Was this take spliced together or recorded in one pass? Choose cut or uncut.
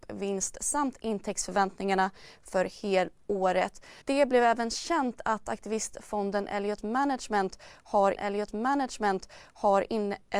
cut